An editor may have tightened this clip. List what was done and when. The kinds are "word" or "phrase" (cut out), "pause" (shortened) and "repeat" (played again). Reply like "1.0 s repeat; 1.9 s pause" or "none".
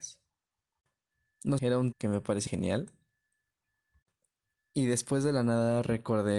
1.6 s word; 1.9 s word; 2.5 s word